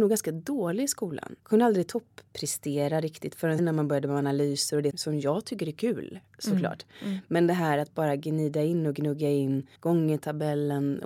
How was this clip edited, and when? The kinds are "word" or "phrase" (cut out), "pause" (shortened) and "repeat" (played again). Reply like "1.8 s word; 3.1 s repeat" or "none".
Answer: 1.4 s pause; 3.6 s word; 4.9 s word; 9.8 s pause